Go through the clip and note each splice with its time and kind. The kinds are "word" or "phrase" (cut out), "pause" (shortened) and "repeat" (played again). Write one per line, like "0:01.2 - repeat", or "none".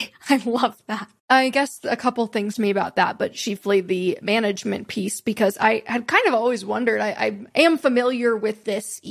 0:01.2 - pause
0:02.5 - phrase
0:07.5 - pause